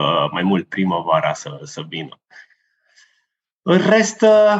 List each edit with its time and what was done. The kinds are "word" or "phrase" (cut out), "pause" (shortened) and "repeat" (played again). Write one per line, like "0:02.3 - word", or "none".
none